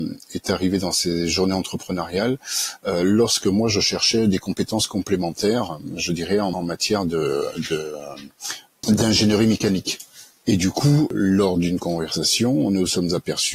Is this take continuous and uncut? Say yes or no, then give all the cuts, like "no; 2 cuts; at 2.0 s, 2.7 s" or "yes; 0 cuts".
yes; 0 cuts